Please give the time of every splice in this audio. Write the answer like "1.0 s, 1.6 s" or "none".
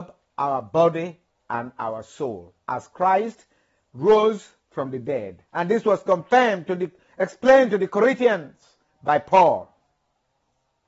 5.5 s